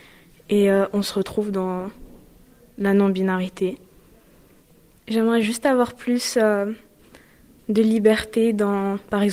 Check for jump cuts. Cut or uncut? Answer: uncut